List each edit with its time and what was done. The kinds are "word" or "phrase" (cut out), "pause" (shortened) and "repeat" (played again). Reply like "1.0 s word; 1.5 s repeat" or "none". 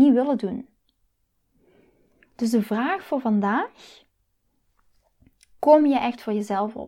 none